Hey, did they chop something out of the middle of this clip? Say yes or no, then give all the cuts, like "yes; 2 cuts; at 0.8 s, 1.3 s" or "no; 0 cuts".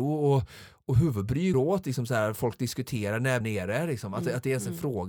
yes; 2 cuts; at 1.5 s, 3.4 s